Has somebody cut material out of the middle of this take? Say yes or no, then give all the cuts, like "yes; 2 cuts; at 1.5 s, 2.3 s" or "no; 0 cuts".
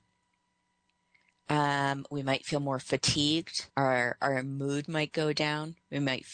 yes; 1 cut; at 3.7 s